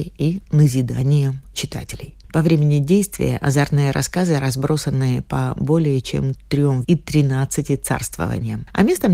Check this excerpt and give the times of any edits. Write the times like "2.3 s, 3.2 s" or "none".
1.5 s, 6.8 s